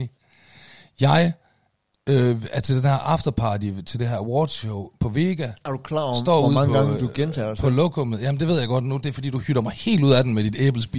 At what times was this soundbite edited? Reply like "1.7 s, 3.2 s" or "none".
7.0 s